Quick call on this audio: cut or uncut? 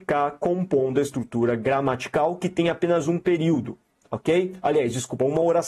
uncut